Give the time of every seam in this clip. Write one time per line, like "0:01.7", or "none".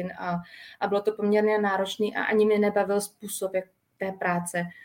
none